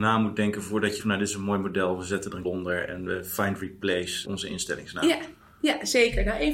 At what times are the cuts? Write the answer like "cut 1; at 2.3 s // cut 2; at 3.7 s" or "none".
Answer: cut 1; at 1.0 s // cut 2; at 2.4 s // cut 3; at 4.2 s